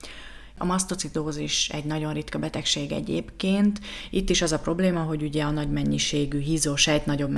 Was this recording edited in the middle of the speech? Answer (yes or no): no